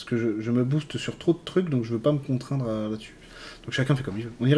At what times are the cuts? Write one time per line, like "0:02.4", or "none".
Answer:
none